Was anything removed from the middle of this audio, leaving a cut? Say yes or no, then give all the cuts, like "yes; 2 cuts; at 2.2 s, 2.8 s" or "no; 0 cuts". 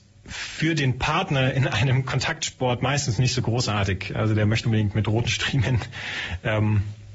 yes; 1 cut; at 4.6 s